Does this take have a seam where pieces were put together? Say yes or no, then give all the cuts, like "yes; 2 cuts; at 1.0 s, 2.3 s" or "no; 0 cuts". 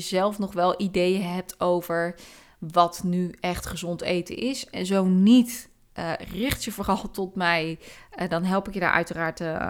no; 0 cuts